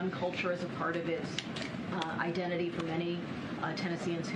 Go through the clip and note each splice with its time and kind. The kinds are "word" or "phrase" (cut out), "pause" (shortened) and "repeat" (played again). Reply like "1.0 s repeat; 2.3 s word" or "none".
none

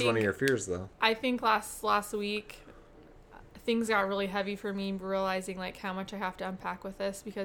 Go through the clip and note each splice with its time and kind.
none

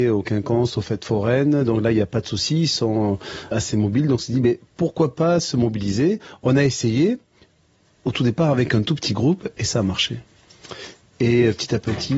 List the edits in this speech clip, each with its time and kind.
3.5 s word

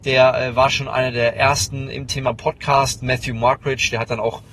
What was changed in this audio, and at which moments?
none

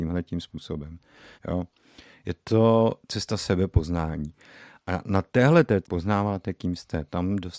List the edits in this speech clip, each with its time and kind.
1.4 s pause; 5.8 s phrase

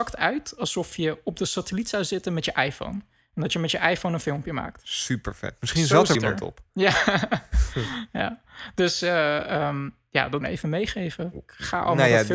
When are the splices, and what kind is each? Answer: 6.1 s word; 10.4 s phrase

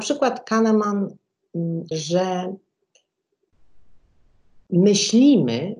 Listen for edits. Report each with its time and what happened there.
1.9 s word

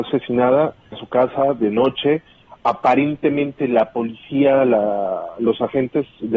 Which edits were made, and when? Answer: 0.9 s word

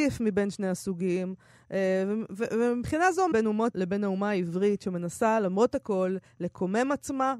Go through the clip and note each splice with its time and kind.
3.3 s word; 3.7 s word

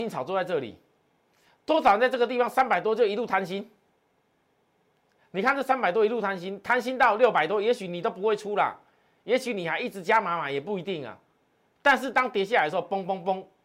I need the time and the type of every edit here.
none

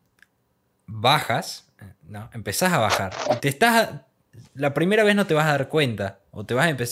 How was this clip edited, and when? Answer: 4.5 s pause

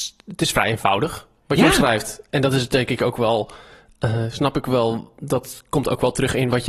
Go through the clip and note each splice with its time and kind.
none

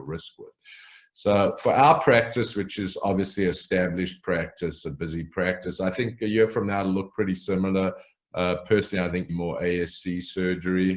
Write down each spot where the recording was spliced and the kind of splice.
9.3 s word

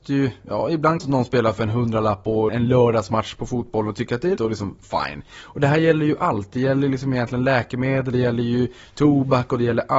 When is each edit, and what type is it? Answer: 1.0 s phrase; 2.5 s word; 4.4 s word; 8.1 s word

